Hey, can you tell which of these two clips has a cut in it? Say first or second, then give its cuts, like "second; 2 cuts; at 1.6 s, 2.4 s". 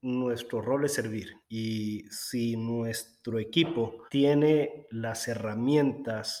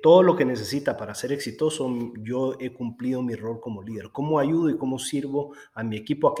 first; 2 cuts; at 1.4 s, 4.1 s